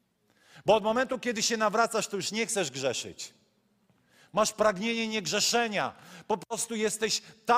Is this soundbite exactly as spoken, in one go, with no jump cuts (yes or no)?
yes